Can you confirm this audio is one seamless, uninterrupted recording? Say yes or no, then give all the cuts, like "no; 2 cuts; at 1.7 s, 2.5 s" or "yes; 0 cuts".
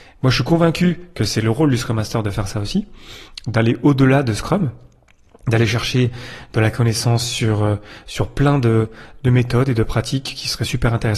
yes; 0 cuts